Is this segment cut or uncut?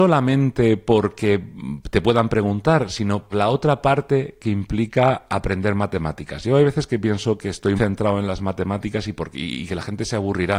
cut